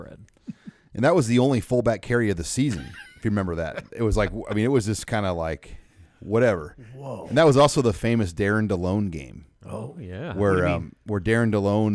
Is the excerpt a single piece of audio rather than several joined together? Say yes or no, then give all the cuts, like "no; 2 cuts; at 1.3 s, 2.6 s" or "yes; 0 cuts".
yes; 0 cuts